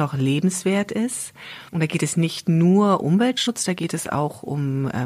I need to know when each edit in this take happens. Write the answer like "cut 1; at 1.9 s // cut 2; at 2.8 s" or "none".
cut 1; at 1.7 s // cut 2; at 3.0 s